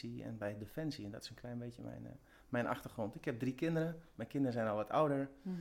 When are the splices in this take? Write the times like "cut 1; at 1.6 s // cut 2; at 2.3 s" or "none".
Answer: none